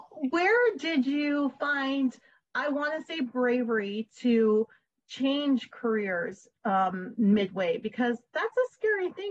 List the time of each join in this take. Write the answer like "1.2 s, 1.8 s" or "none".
none